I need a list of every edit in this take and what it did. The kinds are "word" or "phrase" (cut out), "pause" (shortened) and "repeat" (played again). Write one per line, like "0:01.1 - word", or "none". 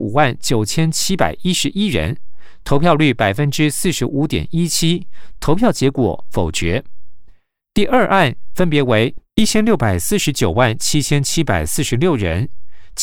none